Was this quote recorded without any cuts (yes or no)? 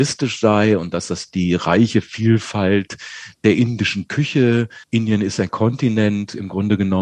no